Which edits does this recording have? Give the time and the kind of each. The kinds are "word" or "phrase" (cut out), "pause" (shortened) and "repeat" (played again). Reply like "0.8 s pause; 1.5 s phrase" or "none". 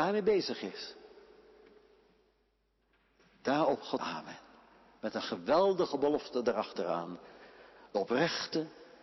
4.0 s phrase